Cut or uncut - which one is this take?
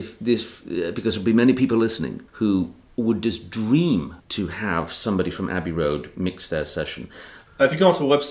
cut